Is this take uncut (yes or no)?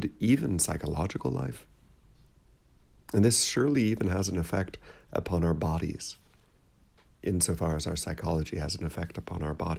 yes